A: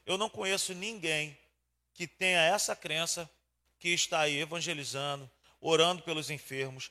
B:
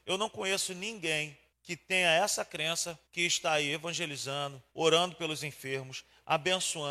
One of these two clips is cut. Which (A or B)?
B